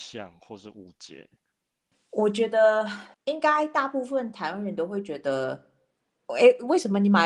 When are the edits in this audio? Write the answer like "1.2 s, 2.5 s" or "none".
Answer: 3.1 s